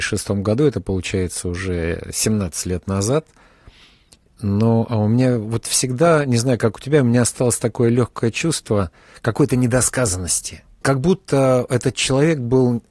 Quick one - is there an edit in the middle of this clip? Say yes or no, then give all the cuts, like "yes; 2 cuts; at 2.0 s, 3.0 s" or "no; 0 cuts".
yes; 1 cut; at 10.8 s